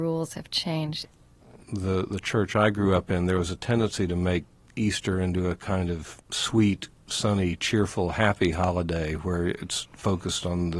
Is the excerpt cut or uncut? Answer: uncut